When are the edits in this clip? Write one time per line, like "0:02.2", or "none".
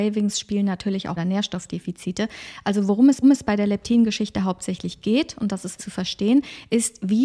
0:01.2
0:03.2
0:05.8